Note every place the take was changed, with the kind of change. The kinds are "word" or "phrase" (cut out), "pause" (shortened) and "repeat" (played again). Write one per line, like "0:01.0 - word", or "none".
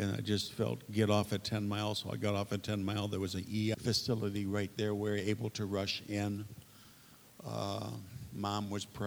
0:03.7 - word